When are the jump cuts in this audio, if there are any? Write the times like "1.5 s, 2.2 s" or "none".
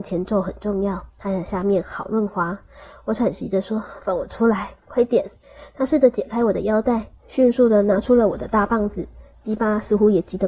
1.1 s, 7.2 s

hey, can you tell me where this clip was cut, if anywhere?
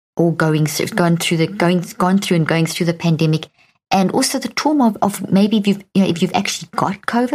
none

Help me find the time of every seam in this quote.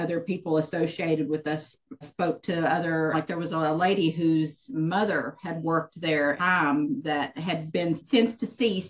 2.0 s, 3.1 s, 6.4 s, 8.0 s

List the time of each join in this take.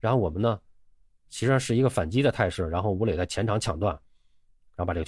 none

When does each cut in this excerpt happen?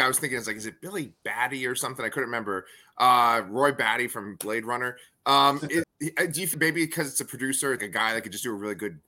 5.8 s, 6.5 s, 7.8 s

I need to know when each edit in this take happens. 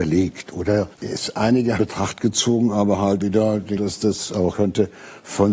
0.9 s, 1.8 s, 3.2 s, 3.8 s, 4.5 s

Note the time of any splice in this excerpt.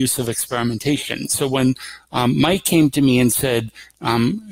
none

